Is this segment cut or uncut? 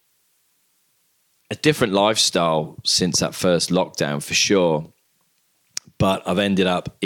uncut